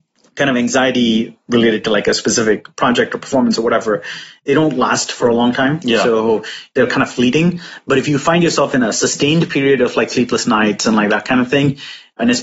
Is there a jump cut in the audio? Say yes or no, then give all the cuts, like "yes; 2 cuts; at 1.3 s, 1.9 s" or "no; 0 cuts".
yes; 1 cut; at 2.7 s